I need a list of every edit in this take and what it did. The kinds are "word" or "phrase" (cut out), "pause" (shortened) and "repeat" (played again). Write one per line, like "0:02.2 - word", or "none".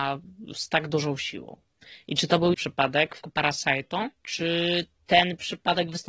0:02.5 - word
0:03.2 - word
0:04.1 - pause